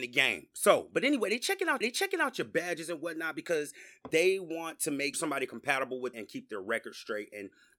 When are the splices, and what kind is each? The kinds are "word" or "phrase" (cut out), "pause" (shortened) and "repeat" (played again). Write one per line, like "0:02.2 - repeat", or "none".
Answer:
0:01.8 - repeat
0:05.1 - phrase
0:06.1 - phrase